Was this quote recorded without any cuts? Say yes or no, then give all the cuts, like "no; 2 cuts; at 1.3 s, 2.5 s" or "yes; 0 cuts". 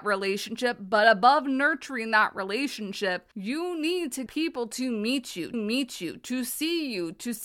no; 3 cuts; at 3.3 s, 4.3 s, 5.5 s